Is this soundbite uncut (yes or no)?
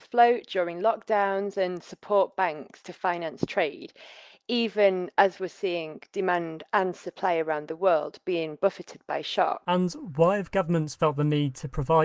yes